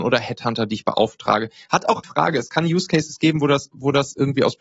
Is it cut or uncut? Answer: cut